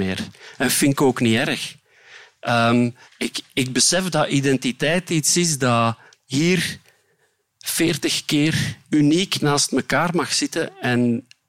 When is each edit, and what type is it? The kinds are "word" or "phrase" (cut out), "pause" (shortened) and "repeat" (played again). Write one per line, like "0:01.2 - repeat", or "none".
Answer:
0:03.0 - pause
0:06.1 - pause
0:08.8 - pause